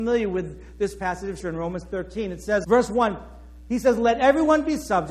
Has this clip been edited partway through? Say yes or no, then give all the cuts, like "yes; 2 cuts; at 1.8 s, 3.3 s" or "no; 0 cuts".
yes; 2 cuts; at 1.4 s, 2.6 s